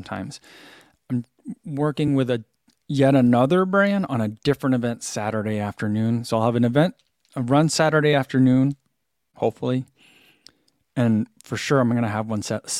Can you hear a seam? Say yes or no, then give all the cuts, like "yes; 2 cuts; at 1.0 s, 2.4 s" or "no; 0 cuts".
no; 0 cuts